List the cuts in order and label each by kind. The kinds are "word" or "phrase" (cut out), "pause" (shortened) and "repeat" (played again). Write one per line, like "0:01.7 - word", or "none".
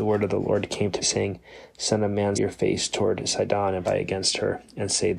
0:01.0 - word
0:02.3 - word
0:03.8 - word